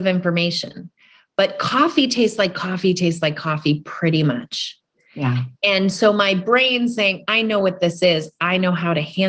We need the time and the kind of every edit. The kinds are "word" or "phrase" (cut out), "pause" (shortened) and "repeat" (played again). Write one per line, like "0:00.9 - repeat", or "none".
none

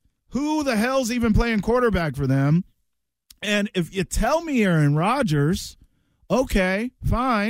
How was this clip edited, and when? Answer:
none

